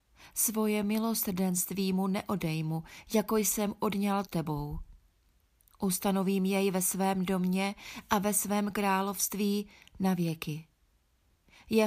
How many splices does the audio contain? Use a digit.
1